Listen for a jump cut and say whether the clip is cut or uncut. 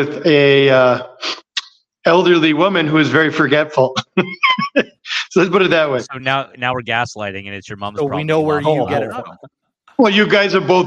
uncut